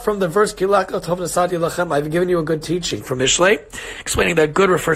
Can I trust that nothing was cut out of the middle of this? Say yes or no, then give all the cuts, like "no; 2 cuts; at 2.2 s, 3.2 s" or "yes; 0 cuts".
yes; 0 cuts